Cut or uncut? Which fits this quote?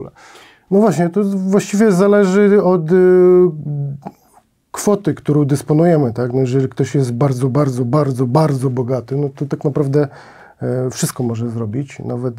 uncut